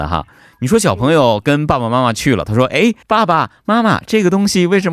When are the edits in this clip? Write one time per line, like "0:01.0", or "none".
0:03.0